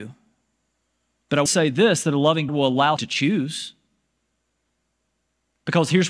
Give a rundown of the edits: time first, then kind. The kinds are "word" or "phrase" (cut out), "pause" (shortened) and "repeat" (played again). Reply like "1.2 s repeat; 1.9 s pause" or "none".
1.5 s word; 2.5 s word; 3.0 s word